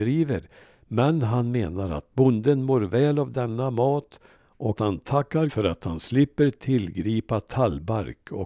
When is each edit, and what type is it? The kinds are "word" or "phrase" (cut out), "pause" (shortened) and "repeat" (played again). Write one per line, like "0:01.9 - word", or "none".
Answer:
0:04.8 - word
0:05.5 - word